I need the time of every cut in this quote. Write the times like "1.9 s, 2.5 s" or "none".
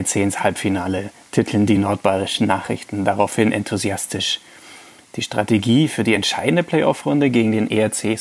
none